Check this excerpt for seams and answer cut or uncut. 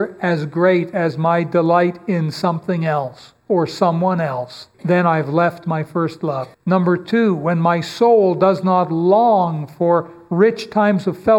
cut